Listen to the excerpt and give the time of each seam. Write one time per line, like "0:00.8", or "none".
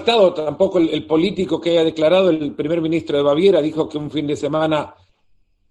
none